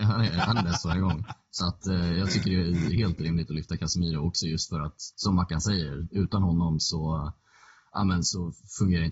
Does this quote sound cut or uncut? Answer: cut